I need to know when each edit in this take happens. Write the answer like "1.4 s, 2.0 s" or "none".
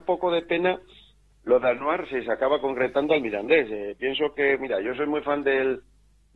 none